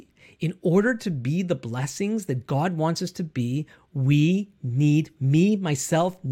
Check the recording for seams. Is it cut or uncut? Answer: uncut